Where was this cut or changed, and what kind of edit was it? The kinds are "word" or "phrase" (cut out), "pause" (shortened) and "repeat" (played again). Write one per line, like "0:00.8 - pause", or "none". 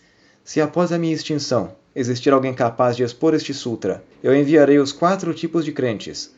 0:04.1 - pause